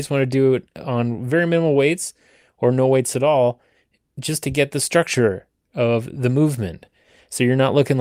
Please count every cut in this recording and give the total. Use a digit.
0